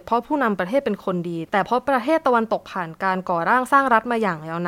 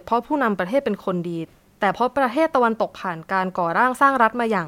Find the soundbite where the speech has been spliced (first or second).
first